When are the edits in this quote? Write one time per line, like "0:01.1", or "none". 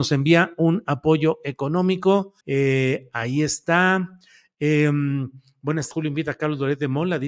0:02.4
0:05.9